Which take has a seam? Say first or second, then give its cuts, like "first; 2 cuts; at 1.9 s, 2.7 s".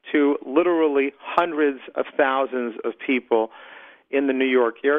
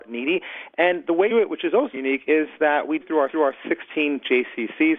second; 4 cuts; at 1.3 s, 1.9 s, 3.0 s, 3.3 s